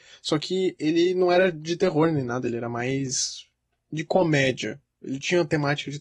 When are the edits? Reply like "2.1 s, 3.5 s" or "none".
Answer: none